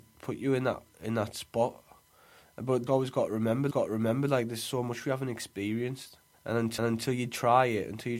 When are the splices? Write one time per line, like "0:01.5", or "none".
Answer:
0:02.9
0:03.7
0:06.3
0:06.8